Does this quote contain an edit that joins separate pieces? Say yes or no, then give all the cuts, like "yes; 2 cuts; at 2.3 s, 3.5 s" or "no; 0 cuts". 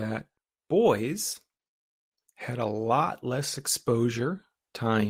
no; 0 cuts